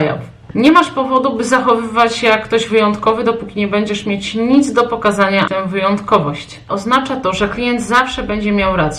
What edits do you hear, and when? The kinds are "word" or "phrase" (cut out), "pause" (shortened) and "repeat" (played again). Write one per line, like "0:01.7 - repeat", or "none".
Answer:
0:05.5 - phrase